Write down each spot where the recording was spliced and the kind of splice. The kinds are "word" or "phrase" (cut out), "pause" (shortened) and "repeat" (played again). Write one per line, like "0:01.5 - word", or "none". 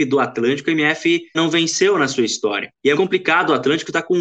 0:01.3 - word
0:02.9 - word